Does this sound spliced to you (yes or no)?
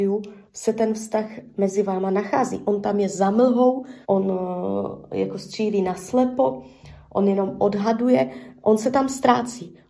yes